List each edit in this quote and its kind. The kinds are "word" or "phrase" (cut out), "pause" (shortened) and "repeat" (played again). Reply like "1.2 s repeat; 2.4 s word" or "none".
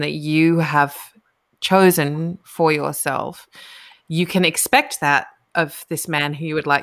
none